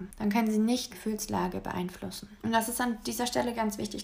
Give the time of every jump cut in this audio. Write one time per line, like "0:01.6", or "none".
0:00.9